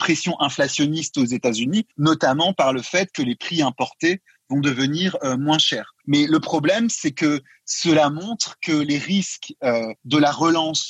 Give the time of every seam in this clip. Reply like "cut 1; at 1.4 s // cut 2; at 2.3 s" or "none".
cut 1; at 1.9 s // cut 2; at 6.0 s // cut 3; at 10.0 s